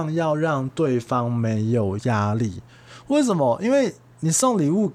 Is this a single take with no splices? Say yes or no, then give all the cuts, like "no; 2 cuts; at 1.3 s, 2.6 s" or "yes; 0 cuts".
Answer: yes; 0 cuts